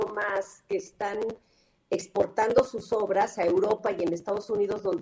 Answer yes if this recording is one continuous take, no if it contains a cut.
yes